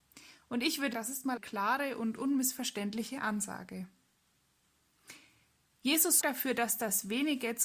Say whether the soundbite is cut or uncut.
cut